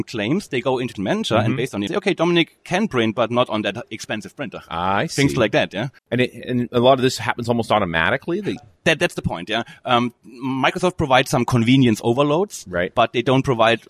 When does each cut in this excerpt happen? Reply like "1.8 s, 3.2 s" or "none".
1.0 s, 1.9 s, 6.0 s, 8.6 s, 10.2 s